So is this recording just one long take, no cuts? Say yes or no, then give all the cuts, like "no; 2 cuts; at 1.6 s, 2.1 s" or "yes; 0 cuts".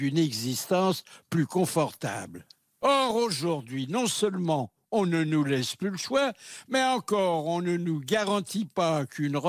yes; 0 cuts